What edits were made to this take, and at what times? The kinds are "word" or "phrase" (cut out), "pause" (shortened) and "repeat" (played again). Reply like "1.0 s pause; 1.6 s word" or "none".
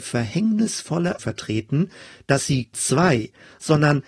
1.2 s word; 2.7 s word